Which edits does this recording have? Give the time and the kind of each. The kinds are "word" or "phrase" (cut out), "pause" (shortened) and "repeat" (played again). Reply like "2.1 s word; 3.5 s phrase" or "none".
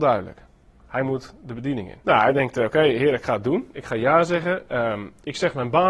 2.0 s pause